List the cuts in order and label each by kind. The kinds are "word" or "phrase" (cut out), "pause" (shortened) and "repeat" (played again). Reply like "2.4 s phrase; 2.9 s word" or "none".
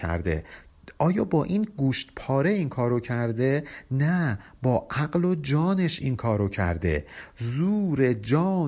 none